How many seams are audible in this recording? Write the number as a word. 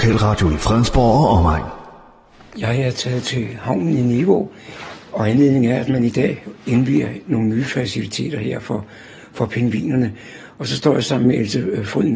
zero